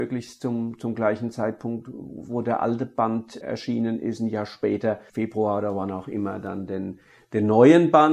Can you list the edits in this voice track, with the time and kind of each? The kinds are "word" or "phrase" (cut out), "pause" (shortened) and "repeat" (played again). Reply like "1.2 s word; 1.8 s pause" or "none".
3.4 s word; 5.1 s phrase